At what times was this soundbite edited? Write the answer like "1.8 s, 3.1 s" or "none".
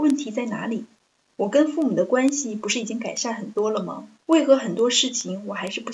4.2 s